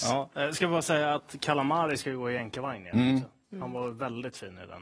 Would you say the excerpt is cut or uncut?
uncut